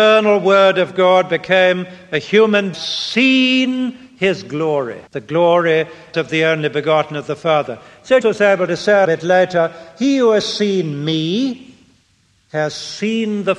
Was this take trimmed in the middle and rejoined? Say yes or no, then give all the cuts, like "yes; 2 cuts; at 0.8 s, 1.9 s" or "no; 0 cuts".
yes; 5 cuts; at 2.7 s, 5.1 s, 6.1 s, 8.2 s, 9.0 s